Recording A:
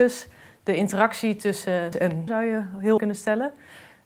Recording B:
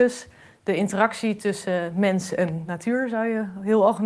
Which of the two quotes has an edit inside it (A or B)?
A